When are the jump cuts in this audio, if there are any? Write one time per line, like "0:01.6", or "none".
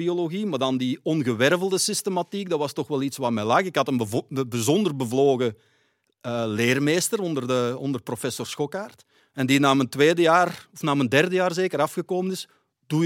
0:09.2